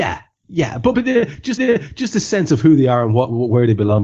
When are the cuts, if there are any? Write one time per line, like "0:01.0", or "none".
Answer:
0:00.9
0:01.6